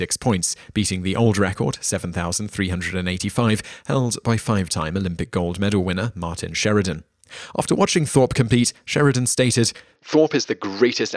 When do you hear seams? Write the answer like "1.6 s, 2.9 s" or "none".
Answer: none